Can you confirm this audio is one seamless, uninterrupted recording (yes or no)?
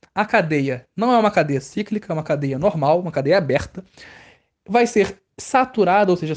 yes